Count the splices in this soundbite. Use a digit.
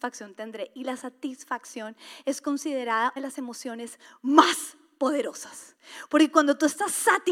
1